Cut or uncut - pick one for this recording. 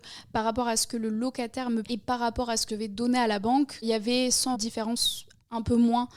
cut